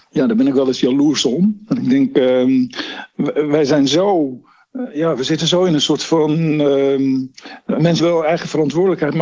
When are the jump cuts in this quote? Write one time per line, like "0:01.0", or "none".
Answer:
0:08.0